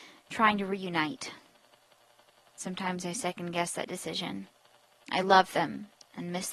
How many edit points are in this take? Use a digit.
0